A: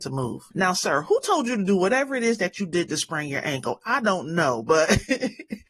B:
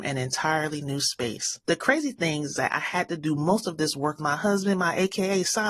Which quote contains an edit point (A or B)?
B